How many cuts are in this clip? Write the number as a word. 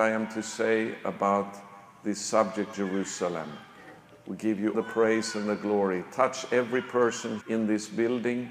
three